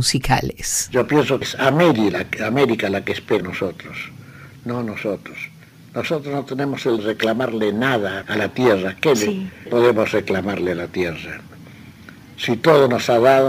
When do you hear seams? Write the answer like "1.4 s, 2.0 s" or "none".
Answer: 1.4 s, 3.4 s, 7.0 s, 8.2 s, 9.7 s